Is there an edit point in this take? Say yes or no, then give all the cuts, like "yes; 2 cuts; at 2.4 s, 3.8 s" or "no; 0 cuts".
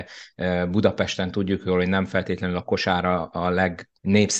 no; 0 cuts